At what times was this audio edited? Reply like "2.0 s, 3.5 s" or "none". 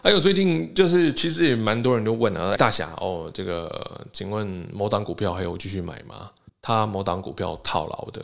2.6 s, 6.5 s